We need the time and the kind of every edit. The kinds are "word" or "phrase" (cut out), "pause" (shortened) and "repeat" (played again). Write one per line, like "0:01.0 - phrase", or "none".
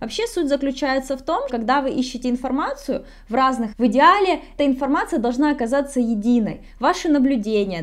0:01.5 - word
0:03.7 - word
0:04.6 - word